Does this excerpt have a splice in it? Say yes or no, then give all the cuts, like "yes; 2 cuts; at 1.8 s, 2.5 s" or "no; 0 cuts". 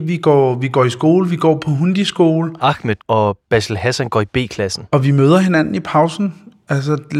yes; 1 cut; at 3.0 s